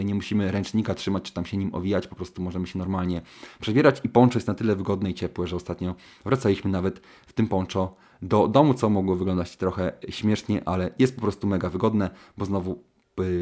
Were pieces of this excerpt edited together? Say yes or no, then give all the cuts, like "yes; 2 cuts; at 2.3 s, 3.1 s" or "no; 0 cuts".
no; 0 cuts